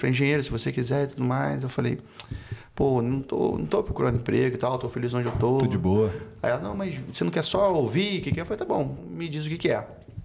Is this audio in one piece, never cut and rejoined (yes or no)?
no